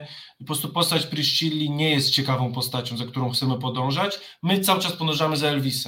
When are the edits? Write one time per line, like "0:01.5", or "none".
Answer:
none